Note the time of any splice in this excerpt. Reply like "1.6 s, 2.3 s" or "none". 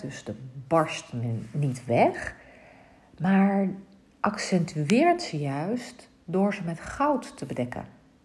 none